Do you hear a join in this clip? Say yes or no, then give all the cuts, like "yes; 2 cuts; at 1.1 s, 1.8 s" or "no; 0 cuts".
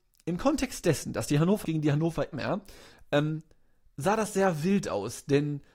yes; 2 cuts; at 1.6 s, 2.3 s